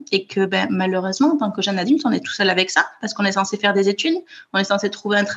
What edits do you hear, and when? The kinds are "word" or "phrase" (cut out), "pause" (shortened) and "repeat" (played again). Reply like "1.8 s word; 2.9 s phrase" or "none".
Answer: none

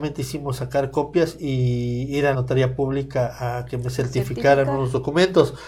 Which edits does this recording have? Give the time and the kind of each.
2.3 s word

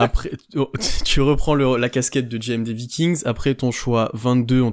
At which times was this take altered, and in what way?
none

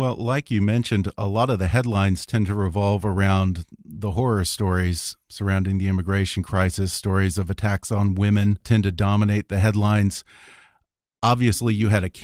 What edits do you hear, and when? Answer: none

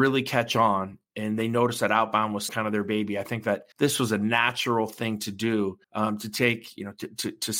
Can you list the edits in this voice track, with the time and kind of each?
1.0 s pause; 2.5 s word; 3.7 s pause; 5.8 s pause

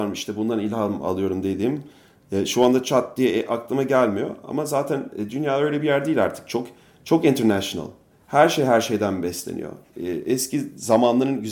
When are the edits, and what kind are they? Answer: none

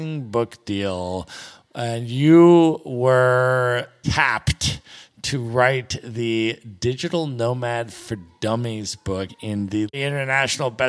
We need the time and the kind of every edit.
none

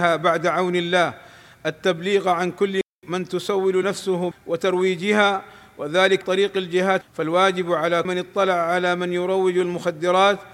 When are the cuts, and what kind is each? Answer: 3.8 s word; 4.3 s word; 6.2 s word; 7.0 s word; 8.0 s word

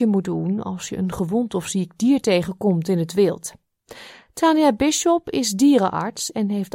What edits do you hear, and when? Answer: none

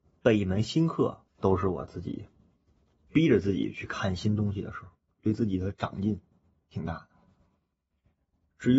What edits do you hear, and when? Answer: 1.3 s pause; 5.0 s pause

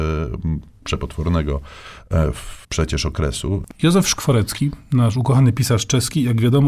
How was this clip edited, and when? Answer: 2.6 s pause

